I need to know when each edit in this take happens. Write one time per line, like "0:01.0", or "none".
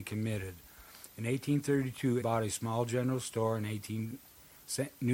0:02.2